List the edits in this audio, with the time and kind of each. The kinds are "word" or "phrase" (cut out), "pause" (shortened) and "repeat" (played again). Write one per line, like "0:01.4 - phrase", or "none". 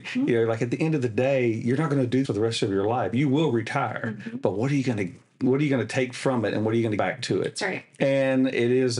0:02.2 - word
0:07.0 - word